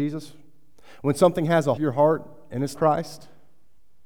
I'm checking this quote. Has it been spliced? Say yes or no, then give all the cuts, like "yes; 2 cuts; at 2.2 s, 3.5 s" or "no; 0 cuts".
yes; 2 cuts; at 1.8 s, 2.7 s